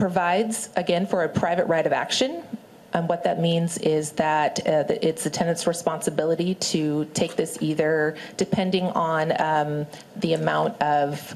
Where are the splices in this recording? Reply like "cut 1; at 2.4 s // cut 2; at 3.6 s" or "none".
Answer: none